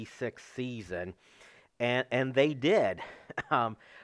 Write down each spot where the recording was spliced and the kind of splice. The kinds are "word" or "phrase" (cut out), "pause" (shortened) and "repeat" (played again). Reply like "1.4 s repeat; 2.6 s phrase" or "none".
none